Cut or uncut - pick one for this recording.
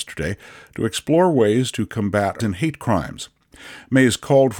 cut